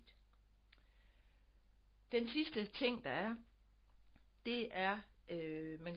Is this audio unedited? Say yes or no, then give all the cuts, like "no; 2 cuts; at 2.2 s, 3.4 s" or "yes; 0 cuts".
yes; 0 cuts